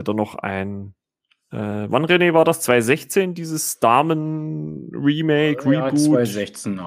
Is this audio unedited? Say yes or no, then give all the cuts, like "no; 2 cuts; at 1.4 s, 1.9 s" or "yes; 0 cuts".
yes; 0 cuts